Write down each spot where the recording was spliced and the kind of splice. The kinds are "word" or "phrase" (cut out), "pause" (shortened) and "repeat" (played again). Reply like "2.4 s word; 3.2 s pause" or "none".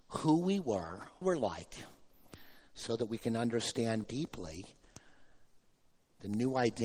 1.2 s phrase; 4.0 s word